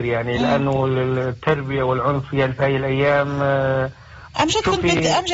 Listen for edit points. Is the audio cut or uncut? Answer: cut